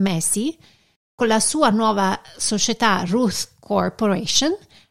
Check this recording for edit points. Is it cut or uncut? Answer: uncut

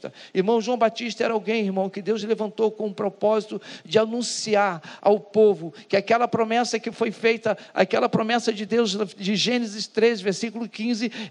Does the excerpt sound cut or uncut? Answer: uncut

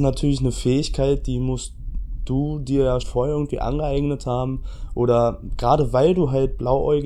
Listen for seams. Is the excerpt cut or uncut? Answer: cut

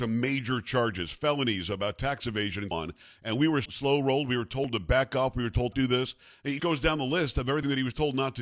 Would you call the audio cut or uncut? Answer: cut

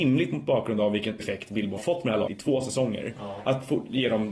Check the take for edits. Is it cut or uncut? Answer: cut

